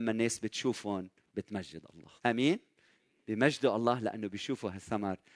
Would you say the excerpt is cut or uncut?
cut